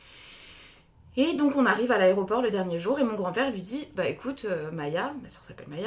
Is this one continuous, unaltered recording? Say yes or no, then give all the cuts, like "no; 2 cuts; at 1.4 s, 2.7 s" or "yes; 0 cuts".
yes; 0 cuts